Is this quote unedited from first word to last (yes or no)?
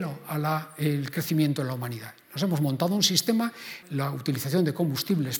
no